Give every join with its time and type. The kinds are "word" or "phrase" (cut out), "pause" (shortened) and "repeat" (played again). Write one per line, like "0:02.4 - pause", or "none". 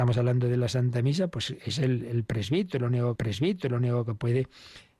0:03.2 - repeat